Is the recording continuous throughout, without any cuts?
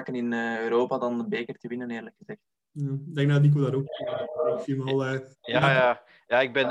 no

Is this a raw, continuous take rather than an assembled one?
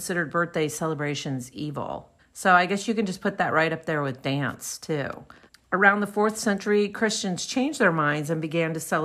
no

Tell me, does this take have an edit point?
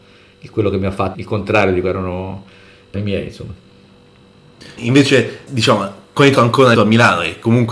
yes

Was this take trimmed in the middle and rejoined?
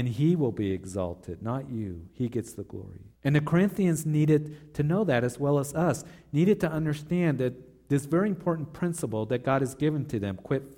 yes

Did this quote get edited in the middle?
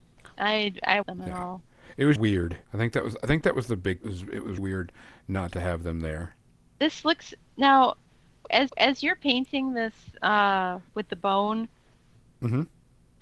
yes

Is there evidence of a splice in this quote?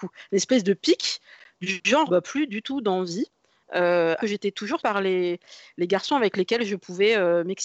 yes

